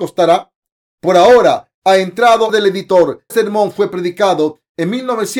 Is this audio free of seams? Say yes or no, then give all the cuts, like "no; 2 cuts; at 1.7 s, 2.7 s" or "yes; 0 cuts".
no; 2 cuts; at 2.5 s, 3.3 s